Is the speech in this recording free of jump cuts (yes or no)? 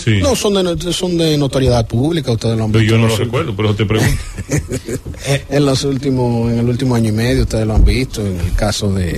yes